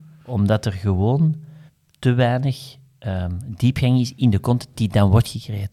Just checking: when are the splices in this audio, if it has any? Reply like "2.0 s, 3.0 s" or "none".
1.7 s

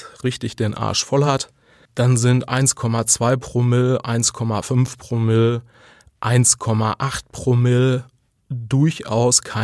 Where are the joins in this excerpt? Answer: none

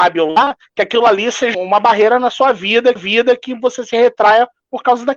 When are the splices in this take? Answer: 1.5 s, 3.0 s

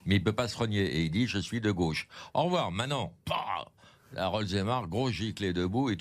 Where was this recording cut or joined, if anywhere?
none

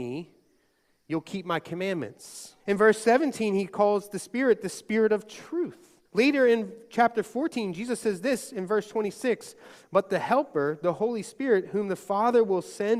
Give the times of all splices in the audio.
2.6 s, 6.1 s

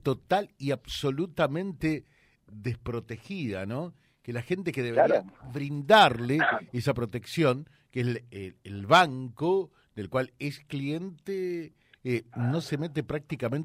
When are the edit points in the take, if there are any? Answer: none

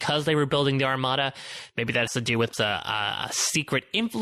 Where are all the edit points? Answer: 2.1 s, 2.5 s

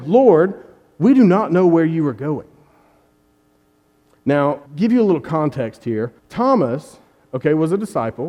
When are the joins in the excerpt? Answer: 4.7 s, 6.2 s

